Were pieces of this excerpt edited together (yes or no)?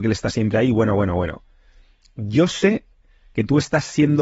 no